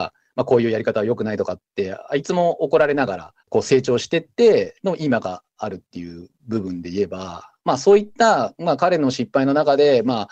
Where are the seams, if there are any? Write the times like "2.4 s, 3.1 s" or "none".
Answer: 3.4 s

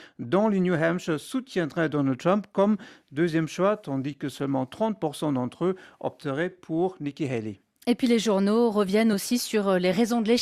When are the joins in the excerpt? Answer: none

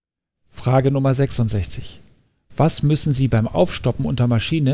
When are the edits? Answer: none

